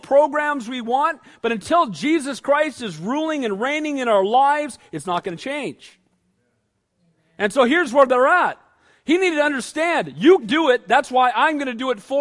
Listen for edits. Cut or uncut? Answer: cut